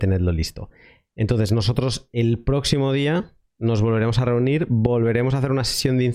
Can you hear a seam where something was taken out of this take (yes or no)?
no